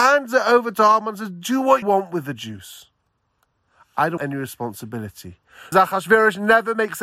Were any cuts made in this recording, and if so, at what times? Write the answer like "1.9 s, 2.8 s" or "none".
1.8 s, 4.2 s, 5.7 s